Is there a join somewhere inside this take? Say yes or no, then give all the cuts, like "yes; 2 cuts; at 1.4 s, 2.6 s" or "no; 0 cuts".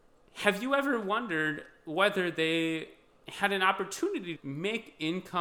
yes; 1 cut; at 4.4 s